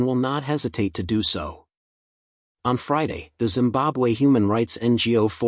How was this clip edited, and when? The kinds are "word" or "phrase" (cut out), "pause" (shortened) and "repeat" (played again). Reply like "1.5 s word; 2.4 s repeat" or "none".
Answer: none

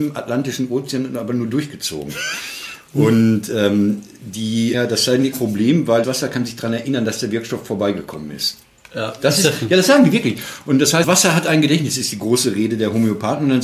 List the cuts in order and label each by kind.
4.7 s phrase; 5.3 s word; 6.0 s word; 11.0 s word

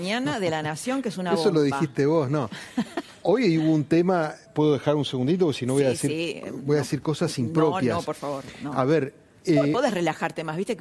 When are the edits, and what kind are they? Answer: none

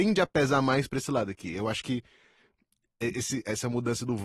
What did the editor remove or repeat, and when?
none

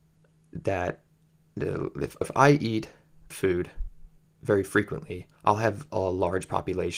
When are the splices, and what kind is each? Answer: 2.2 s word; 3.3 s phrase; 4.2 s pause; 5.4 s pause

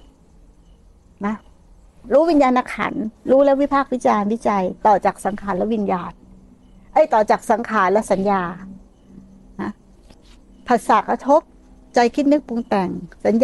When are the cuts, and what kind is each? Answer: none

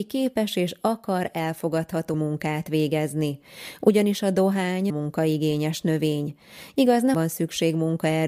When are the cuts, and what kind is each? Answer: 2.1 s word; 4.9 s word; 7.1 s phrase

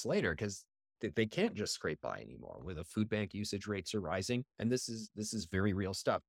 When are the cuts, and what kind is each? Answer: 4.5 s pause

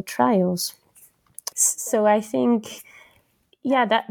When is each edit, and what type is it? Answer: 1.5 s word

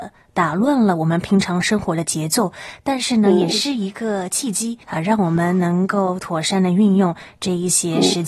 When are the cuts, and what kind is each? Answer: 4.8 s pause

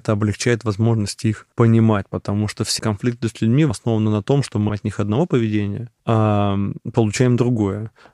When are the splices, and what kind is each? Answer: 1.5 s pause; 2.8 s word; 3.7 s word; 4.7 s word; 6.0 s pause

